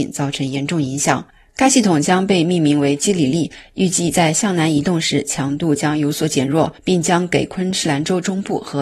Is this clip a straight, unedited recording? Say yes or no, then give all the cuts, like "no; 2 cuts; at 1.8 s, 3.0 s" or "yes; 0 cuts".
no; 1 cut; at 6.8 s